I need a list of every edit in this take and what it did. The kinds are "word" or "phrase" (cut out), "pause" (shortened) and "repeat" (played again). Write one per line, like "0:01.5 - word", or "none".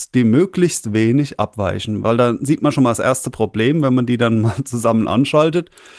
none

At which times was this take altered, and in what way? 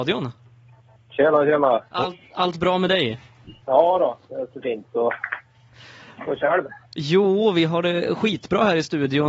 0:01.9 - pause
0:03.6 - pause
0:06.8 - pause

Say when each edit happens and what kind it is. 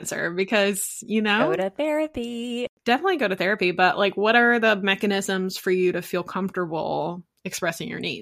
0:02.7 - pause

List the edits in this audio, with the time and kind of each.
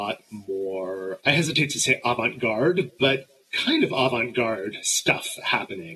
none

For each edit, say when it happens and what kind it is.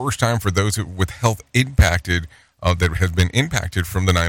none

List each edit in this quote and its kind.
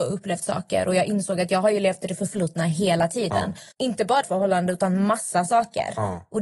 0:03.7 - pause
0:04.2 - phrase

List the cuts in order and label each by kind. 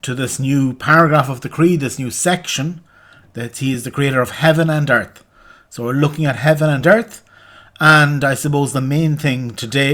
none

